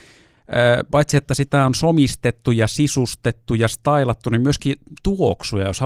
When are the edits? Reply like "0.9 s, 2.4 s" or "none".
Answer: none